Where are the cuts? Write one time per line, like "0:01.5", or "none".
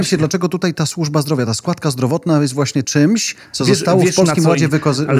0:02.8